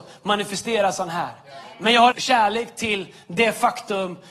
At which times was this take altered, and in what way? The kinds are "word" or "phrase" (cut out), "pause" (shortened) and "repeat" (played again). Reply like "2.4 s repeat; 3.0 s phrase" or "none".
2.1 s phrase